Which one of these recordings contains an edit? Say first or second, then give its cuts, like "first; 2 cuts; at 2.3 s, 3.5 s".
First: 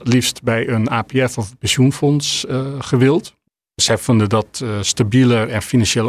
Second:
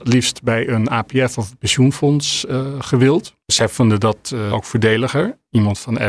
second; 2 cuts; at 3.4 s, 4.5 s